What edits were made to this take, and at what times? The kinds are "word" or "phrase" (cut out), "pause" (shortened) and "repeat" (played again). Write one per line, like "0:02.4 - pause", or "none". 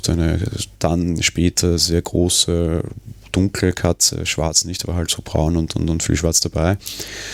none